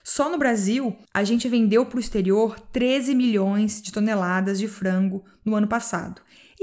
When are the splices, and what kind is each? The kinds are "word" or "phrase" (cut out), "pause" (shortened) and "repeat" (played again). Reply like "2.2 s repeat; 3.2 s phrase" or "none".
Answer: 1.1 s pause